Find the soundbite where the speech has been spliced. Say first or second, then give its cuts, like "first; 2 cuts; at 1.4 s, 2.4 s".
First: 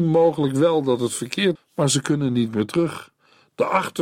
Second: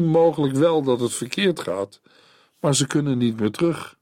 first; 1 cut; at 1.6 s